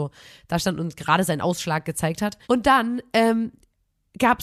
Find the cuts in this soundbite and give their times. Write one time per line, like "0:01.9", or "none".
0:02.4